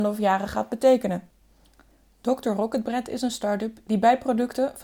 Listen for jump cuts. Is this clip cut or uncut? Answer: uncut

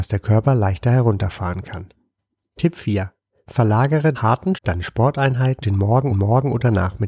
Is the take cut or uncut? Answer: cut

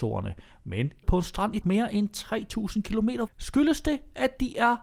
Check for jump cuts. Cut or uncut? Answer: cut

